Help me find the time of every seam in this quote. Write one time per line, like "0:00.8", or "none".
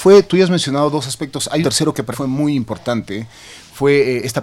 0:01.6
0:02.1